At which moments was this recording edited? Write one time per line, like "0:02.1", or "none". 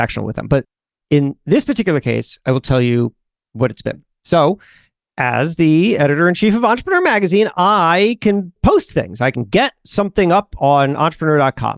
none